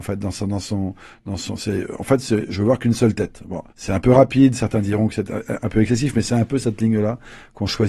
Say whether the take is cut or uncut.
cut